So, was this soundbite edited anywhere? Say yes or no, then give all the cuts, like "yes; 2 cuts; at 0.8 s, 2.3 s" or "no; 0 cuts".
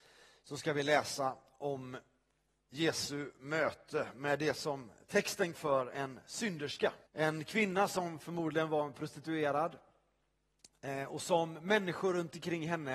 yes; 2 cuts; at 5.5 s, 7.1 s